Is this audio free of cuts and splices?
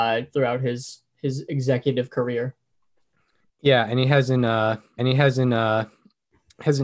no; 1 cut; at 5.0 s

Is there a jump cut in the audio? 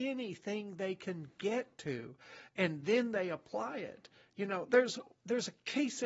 no; 0 cuts

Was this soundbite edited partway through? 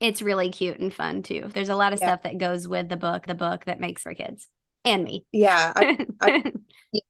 yes; 5 cuts; at 1.5 s, 3.3 s, 4.0 s, 4.7 s, 6.2 s

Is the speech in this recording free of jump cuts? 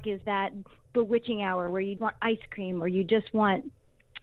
no; 1 cut; at 2.0 s

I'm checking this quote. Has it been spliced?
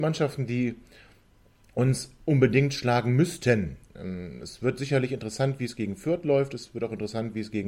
no; 0 cuts

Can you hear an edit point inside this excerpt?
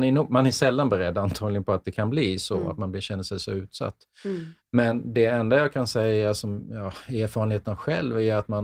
yes; 1 cut; at 4.6 s

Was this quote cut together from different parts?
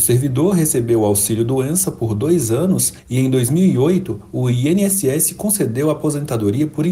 no; 0 cuts

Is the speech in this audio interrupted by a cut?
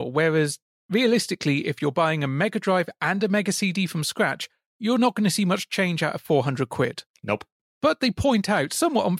no; 0 cuts

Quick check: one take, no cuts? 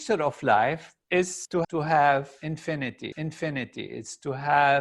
no; 3 cuts; at 1.0 s, 1.6 s, 3.1 s

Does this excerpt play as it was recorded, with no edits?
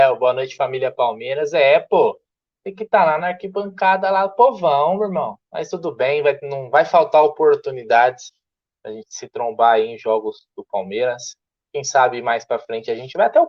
no; 2 cuts; at 3.2 s, 5.4 s

